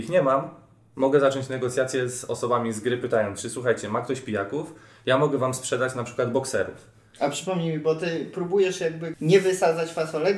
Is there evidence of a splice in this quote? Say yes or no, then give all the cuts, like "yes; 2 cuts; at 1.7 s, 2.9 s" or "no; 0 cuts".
yes; 1 cut; at 9.1 s